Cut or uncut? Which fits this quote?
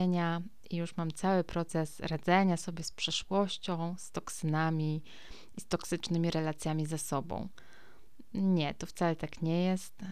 uncut